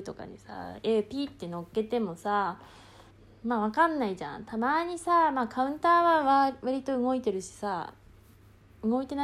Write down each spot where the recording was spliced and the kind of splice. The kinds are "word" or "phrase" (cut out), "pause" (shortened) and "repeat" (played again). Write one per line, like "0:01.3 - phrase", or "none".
0:03.1 - pause